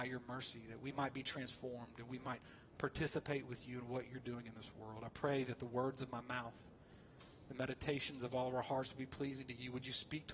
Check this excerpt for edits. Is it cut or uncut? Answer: uncut